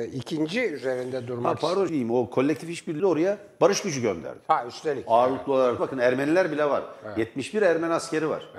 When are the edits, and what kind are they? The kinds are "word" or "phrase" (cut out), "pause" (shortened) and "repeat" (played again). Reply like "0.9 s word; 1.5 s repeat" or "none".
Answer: 1.9 s word; 3.0 s word; 5.8 s word